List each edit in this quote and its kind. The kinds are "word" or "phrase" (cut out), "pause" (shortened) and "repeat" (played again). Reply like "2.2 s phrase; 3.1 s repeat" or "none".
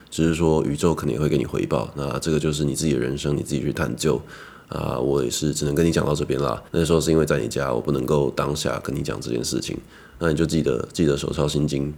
6.7 s pause